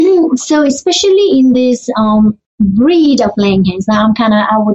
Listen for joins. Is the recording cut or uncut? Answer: uncut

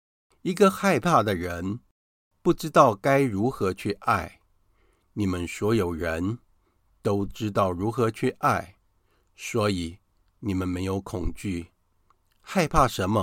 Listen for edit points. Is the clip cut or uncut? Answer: uncut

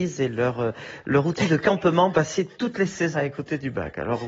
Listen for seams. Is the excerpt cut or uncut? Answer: cut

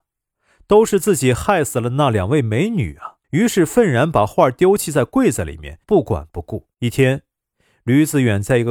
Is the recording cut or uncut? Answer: cut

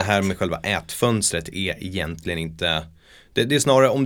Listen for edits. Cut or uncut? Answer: uncut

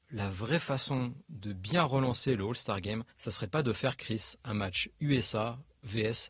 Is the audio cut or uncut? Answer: cut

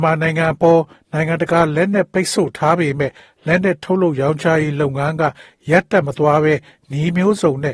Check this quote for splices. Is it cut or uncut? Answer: uncut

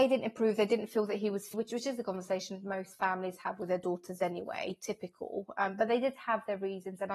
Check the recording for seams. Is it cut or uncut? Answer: cut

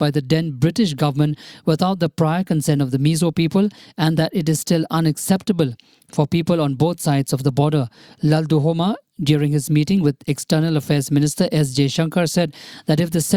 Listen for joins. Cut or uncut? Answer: uncut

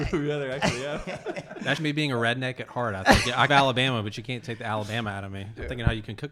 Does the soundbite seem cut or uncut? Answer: cut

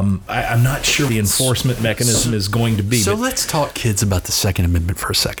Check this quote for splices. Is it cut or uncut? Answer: cut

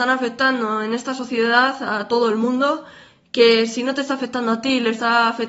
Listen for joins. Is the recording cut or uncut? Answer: uncut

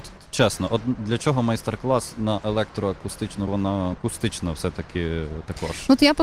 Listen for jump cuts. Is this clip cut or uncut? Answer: cut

